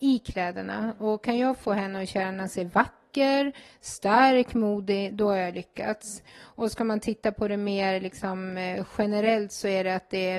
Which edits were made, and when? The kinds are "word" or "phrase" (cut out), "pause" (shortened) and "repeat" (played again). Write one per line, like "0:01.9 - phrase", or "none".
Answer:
0:06.3 - pause